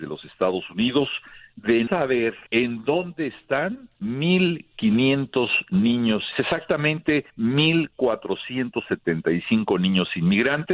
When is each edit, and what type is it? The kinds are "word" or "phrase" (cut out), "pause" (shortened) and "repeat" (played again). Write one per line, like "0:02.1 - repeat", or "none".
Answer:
0:01.9 - word
0:02.5 - pause
0:04.0 - pause
0:06.3 - word
0:07.3 - pause